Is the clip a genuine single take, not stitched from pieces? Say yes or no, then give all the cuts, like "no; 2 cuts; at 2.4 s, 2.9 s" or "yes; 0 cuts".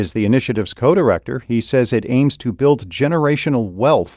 yes; 0 cuts